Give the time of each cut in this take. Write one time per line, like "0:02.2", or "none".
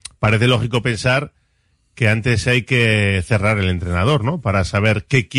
none